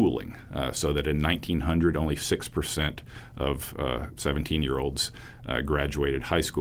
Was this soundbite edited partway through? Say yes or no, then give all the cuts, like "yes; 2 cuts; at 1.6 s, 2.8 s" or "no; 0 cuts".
no; 0 cuts